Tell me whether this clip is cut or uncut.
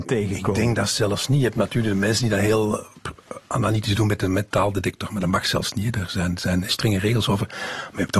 cut